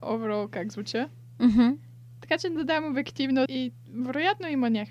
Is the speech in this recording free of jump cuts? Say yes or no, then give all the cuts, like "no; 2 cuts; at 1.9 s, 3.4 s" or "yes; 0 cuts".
no; 2 cuts; at 2.6 s, 3.5 s